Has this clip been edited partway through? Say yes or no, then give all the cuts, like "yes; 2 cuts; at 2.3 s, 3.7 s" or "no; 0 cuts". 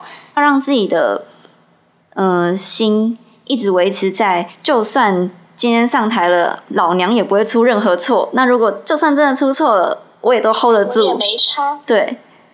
no; 0 cuts